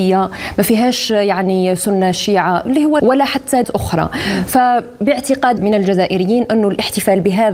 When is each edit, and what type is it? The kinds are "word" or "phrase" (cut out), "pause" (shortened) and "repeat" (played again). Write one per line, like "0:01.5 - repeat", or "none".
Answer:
0:03.0 - word
0:03.6 - word
0:05.6 - word